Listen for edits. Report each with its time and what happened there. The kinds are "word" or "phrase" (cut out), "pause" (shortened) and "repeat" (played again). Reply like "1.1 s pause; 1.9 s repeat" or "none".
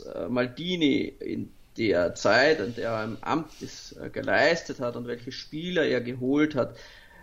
none